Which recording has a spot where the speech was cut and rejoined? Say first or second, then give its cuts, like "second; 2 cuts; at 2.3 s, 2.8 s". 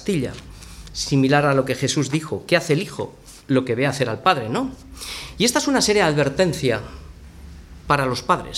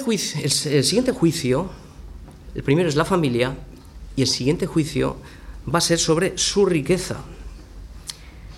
first; 1 cut; at 3.4 s